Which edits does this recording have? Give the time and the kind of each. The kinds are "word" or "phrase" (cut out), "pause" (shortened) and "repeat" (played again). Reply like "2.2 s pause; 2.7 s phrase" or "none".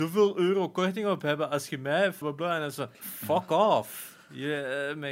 2.2 s word; 2.9 s pause